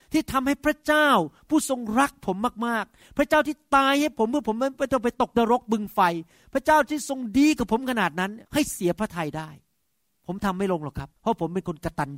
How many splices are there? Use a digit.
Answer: 2